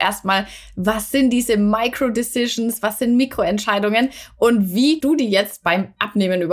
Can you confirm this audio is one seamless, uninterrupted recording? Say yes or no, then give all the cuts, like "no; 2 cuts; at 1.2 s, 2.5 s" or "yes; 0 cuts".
no; 1 cut; at 5.0 s